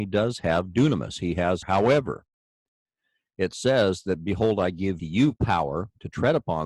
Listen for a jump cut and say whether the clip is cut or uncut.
cut